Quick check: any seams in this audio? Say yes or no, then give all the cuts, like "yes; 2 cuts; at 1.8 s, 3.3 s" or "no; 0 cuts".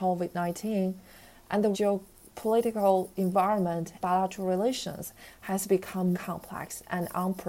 yes; 3 cuts; at 1.7 s, 4.0 s, 6.1 s